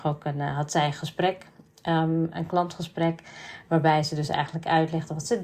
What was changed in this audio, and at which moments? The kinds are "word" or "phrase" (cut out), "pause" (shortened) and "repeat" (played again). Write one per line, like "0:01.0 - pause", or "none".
none